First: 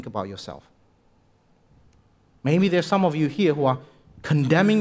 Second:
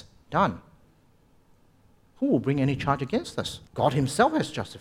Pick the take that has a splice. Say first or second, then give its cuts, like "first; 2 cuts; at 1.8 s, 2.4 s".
second; 1 cut; at 3.7 s